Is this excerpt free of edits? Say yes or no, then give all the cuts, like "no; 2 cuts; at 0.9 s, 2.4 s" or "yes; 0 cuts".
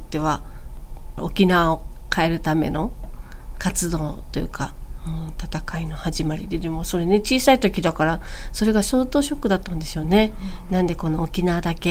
yes; 0 cuts